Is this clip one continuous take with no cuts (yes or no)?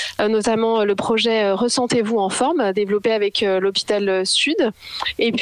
yes